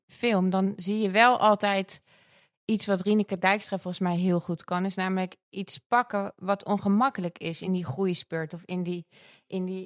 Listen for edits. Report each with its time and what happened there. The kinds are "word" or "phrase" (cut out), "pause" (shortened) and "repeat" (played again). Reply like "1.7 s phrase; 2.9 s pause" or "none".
none